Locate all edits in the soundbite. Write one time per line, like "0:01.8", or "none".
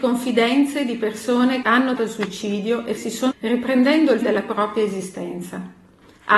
0:01.6
0:02.0
0:03.0
0:03.3
0:04.2